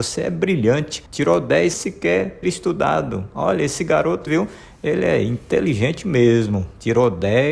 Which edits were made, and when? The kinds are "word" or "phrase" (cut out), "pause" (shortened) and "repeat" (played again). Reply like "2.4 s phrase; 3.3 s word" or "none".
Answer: 1.1 s pause; 1.7 s word; 2.4 s word; 4.3 s word